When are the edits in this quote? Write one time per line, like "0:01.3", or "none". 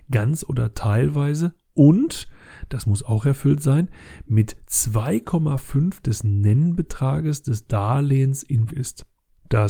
0:06.0
0:08.7